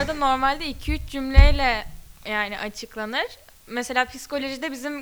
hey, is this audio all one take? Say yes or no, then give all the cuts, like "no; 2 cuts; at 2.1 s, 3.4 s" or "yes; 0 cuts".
yes; 0 cuts